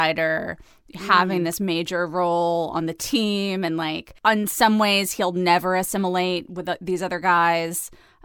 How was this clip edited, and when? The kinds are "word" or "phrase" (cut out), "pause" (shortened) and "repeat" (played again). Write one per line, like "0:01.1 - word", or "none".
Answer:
0:04.2 - pause